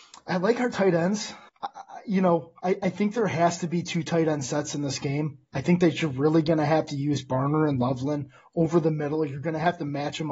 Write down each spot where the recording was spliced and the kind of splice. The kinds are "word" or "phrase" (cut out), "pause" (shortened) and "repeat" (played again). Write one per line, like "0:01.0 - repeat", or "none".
0:01.5 - pause